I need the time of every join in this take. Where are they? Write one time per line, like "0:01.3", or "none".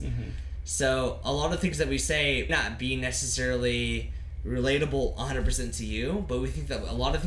0:02.5